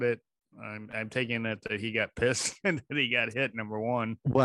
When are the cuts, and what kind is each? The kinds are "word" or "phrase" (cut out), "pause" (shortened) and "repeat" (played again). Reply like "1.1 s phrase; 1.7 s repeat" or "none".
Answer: none